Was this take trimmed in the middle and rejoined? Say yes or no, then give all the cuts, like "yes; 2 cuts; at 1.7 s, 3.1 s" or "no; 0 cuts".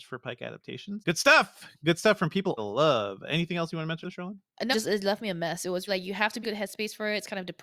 yes; 6 cuts; at 1.0 s, 2.6 s, 4.0 s, 4.7 s, 5.9 s, 6.4 s